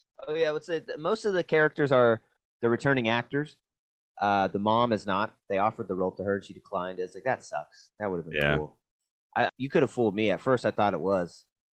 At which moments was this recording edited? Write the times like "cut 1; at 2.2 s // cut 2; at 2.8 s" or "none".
cut 1; at 9.5 s